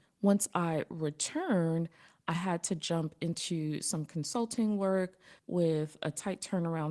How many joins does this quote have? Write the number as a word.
one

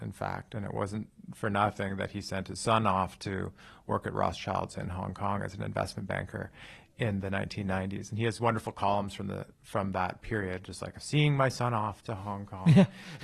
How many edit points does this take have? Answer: one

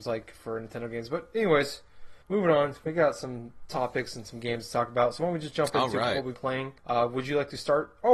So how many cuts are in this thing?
three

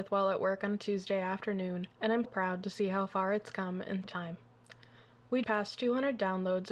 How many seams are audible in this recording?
four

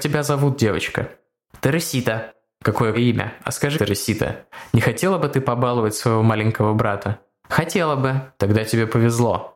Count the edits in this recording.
two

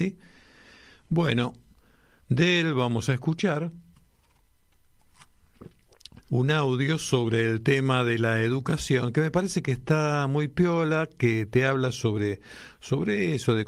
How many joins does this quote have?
one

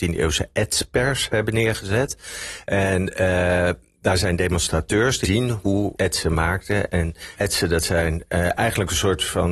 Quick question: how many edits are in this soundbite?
three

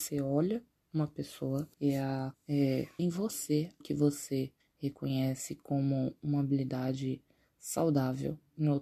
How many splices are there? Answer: five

